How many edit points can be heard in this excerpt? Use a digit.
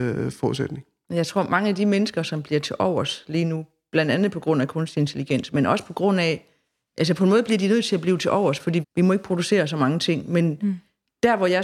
1